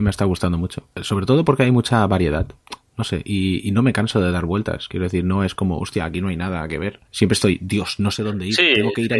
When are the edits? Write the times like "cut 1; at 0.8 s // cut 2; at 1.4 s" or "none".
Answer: cut 1; at 0.9 s // cut 2; at 7.1 s